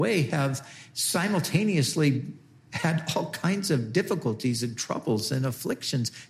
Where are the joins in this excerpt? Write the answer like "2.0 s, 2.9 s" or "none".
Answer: none